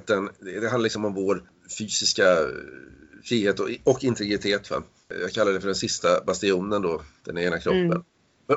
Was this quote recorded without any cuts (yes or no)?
yes